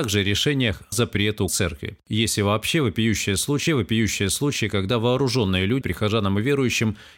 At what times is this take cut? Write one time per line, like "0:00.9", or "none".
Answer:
0:00.9
0:01.5
0:02.0
0:03.7
0:05.8